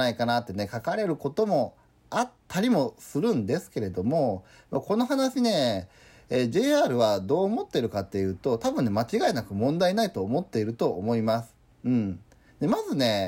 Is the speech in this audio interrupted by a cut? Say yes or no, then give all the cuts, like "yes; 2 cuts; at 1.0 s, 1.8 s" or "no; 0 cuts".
no; 0 cuts